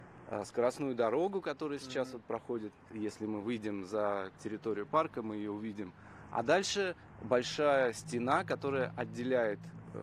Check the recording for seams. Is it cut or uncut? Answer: uncut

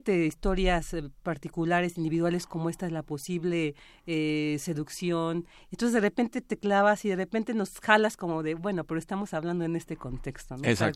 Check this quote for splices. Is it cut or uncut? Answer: uncut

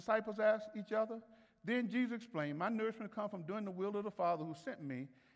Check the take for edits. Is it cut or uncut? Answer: uncut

